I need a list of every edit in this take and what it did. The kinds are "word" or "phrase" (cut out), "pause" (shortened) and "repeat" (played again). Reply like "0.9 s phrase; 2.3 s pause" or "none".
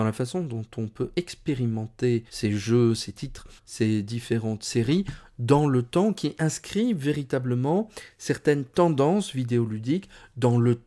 2.3 s pause; 3.6 s pause